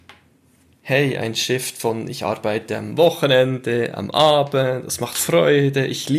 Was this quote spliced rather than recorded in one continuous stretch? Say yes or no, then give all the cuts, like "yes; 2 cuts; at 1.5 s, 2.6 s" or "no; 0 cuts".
no; 0 cuts